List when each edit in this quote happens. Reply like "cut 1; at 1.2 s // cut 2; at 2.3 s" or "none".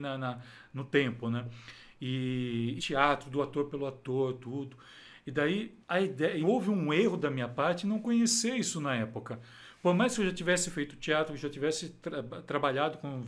cut 1; at 2.8 s // cut 2; at 5.8 s // cut 3; at 6.4 s